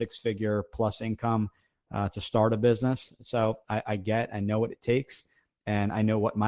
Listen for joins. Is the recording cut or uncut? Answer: uncut